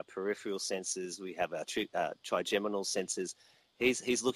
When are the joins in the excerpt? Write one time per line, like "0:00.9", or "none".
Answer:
none